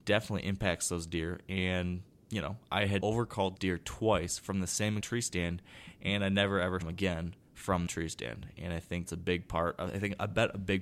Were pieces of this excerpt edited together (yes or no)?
yes